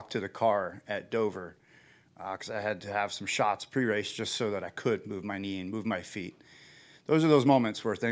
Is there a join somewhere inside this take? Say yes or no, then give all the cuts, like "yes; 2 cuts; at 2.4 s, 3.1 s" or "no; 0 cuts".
no; 0 cuts